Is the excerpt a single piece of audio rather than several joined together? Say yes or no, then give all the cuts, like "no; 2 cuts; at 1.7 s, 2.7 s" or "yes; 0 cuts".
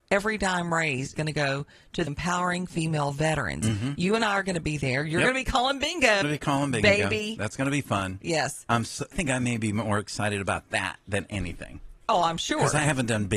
no; 4 cuts; at 1.2 s, 2.1 s, 6.2 s, 9.1 s